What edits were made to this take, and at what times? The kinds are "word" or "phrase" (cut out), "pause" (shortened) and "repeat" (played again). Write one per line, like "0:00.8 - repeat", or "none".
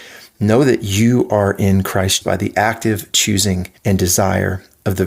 0:02.2 - word
0:03.8 - pause